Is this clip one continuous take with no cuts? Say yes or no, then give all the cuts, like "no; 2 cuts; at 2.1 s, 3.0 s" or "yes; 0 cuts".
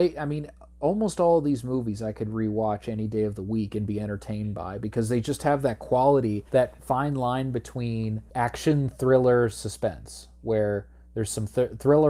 no; 2 cuts; at 6.5 s, 8.3 s